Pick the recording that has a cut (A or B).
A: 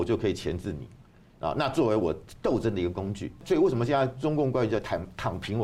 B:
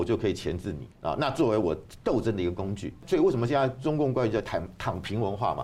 B